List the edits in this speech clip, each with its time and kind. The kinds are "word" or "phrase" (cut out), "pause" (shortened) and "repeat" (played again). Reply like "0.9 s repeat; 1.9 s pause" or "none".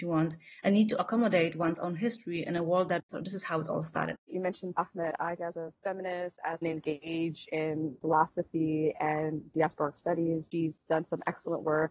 3.0 s phrase; 4.2 s pause; 4.8 s word; 5.4 s word; 6.6 s phrase